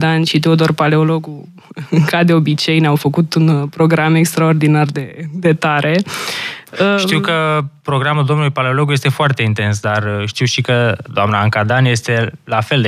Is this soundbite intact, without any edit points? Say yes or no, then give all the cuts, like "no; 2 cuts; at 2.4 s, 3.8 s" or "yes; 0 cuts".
no; 1 cut; at 11.1 s